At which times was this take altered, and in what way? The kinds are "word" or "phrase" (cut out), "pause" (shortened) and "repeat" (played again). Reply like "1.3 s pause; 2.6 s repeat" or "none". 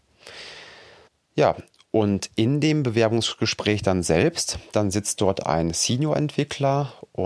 1.1 s pause